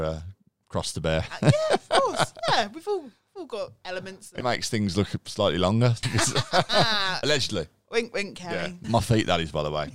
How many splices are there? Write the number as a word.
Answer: four